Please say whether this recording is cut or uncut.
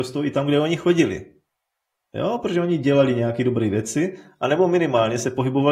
uncut